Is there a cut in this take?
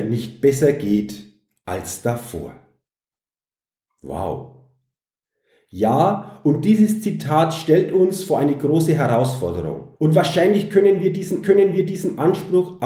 yes; 2 cuts; at 10.0 s, 11.4 s

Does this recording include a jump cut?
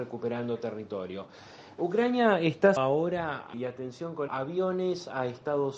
yes; 3 cuts; at 2.8 s, 3.5 s, 4.3 s

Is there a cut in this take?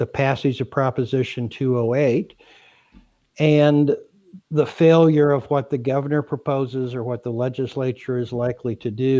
no; 0 cuts

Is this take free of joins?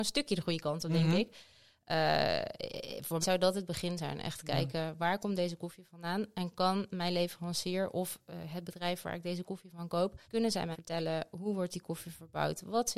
no; 3 cuts; at 3.2 s, 10.2 s, 10.7 s

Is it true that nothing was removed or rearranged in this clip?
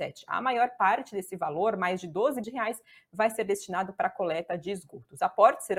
no; 1 cut; at 2.4 s

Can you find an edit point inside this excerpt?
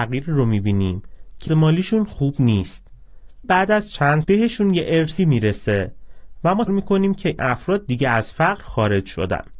yes; 6 cuts; at 1.5 s, 3.4 s, 4.2 s, 5.2 s, 6.7 s, 7.4 s

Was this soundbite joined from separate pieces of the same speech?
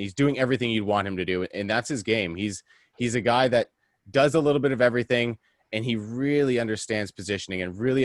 no; 0 cuts

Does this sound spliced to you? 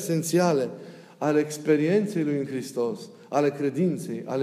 no; 0 cuts

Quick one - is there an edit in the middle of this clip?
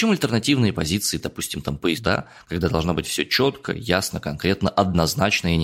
yes; 1 cut; at 1.9 s

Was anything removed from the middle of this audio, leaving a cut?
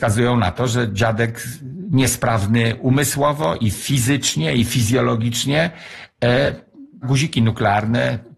yes; 1 cut; at 7.0 s

